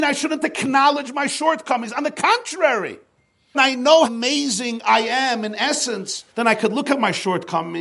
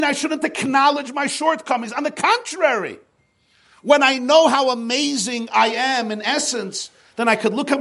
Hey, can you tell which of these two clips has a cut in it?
first; 3 cuts; at 3.5 s, 4.0 s, 6.3 s

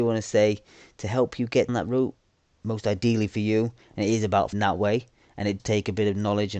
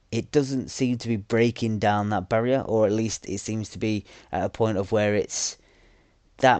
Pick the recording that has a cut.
first; 4 cuts; at 1.7 s, 2.4 s, 4.5 s, 5.6 s

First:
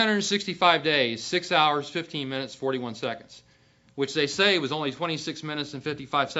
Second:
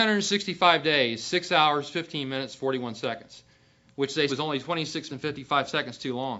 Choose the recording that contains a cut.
second; 2 cuts; at 4.3 s, 5.1 s

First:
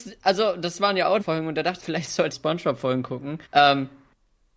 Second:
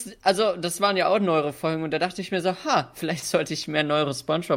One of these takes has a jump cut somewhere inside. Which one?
first; 4 cuts; at 1.2 s, 1.8 s, 2.3 s, 3.4 s

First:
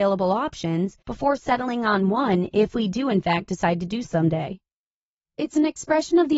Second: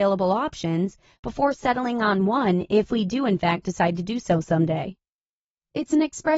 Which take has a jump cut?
first; 2 cuts; at 1.0 s, 4.0 s

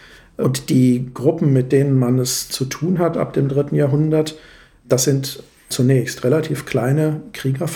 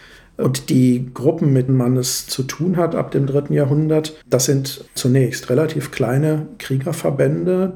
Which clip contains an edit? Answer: second; 3 cuts; at 1.7 s, 4.2 s, 4.9 s

